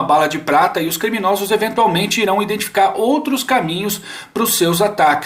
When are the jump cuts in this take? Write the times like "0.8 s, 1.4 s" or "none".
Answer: none